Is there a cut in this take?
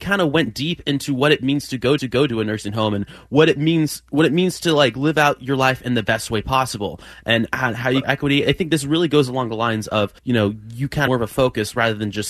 yes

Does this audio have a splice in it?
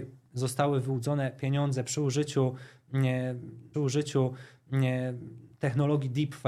yes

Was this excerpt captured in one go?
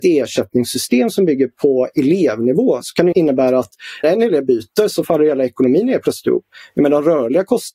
no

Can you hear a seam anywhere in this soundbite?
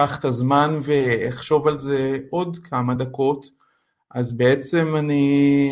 no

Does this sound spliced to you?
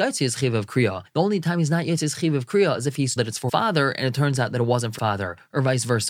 yes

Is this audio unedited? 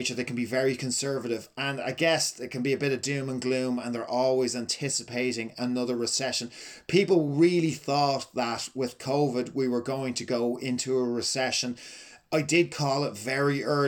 yes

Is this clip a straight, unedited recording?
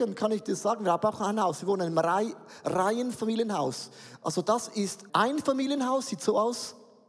no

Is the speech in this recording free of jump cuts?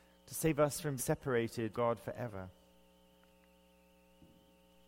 no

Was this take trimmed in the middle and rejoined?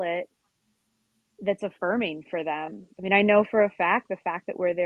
yes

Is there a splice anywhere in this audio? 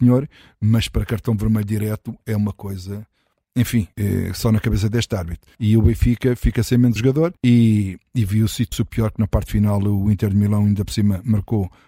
yes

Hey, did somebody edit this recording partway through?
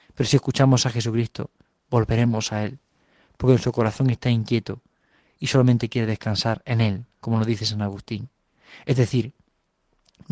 no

